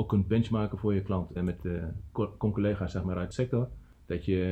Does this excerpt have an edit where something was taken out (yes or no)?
yes